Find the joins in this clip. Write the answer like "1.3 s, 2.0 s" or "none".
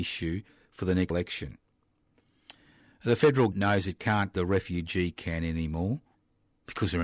1.1 s, 3.5 s, 4.3 s